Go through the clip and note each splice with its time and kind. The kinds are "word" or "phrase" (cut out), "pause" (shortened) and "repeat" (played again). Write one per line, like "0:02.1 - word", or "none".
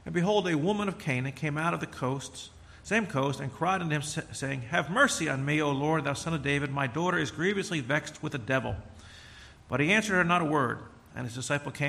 none